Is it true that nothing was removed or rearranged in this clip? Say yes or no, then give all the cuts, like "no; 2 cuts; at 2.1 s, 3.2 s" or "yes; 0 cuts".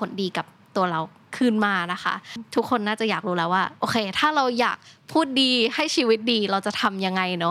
yes; 0 cuts